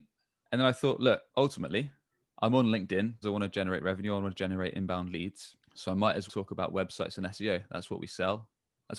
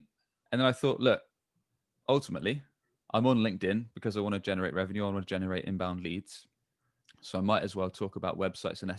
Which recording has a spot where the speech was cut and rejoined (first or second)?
first